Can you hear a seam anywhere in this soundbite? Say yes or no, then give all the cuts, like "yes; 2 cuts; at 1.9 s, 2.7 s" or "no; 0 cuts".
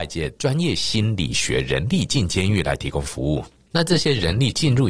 no; 0 cuts